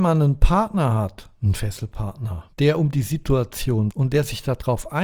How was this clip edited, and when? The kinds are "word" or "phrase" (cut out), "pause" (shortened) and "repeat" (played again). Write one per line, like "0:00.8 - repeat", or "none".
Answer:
0:01.6 - word
0:02.5 - pause
0:03.9 - word